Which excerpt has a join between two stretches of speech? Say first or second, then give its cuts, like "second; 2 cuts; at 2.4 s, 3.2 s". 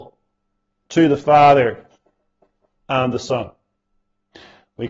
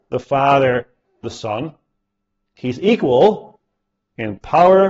second; 1 cut; at 1.2 s